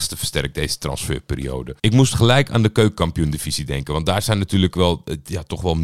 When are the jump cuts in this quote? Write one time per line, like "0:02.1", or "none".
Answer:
0:01.8